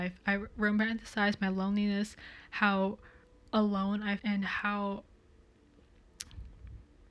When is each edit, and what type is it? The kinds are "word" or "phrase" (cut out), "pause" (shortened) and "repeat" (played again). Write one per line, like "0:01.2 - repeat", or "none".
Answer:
0:03.2 - pause
0:04.2 - word